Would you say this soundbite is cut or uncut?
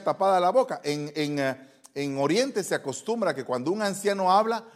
uncut